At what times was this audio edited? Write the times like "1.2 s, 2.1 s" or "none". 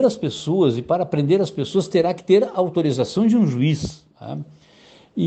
4.1 s